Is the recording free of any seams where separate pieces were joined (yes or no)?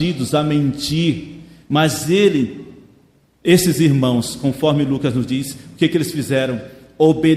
yes